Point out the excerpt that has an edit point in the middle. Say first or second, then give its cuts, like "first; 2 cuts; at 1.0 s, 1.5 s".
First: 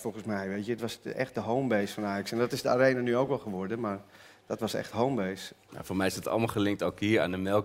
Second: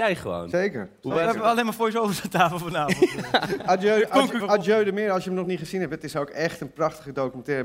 second; 1 cut; at 4.4 s